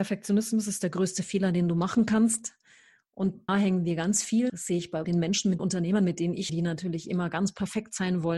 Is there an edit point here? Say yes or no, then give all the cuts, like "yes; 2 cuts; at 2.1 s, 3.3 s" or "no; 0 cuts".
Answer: yes; 5 cuts; at 3.5 s, 4.5 s, 5.0 s, 5.6 s, 6.5 s